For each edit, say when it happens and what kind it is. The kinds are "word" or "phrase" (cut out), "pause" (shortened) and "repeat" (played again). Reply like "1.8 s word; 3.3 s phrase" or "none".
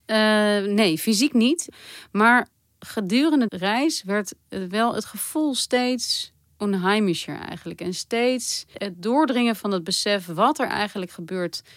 3.5 s word; 8.7 s word